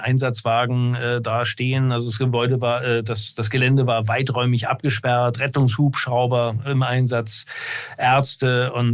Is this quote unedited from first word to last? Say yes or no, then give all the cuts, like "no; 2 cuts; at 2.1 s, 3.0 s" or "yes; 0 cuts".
yes; 0 cuts